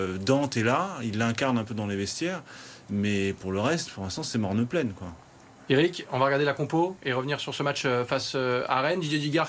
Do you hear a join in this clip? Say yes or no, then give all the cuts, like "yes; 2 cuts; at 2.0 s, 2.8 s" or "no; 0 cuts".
no; 0 cuts